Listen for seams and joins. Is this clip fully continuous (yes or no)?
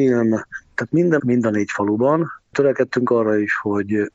no